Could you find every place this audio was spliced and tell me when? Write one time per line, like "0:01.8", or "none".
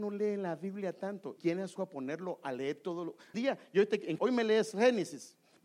0:01.4
0:01.8
0:03.3
0:04.2